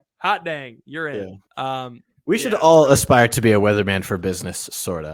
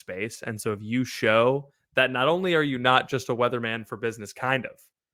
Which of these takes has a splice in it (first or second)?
first